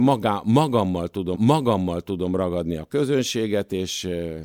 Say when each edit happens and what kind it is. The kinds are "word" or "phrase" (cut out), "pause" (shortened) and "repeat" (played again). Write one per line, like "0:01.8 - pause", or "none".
0:01.3 - repeat